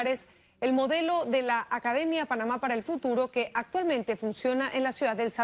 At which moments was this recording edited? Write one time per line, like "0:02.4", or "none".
none